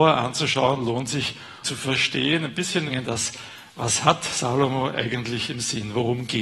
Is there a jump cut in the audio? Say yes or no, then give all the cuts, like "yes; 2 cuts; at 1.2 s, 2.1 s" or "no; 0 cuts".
yes; 2 cuts; at 1.6 s, 2.9 s